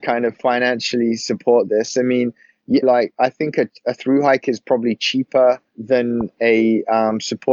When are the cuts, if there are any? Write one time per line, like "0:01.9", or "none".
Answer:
0:02.8
0:05.7